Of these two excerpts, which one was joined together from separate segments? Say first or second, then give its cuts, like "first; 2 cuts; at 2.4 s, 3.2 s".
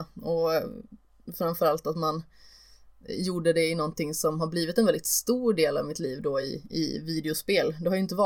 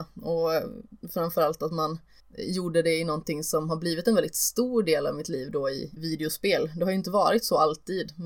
second; 3 cuts; at 1.0 s, 2.2 s, 6.0 s